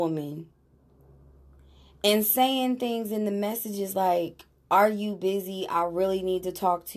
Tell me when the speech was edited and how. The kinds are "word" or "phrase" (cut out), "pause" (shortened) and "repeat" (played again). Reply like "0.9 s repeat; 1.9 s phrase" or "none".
none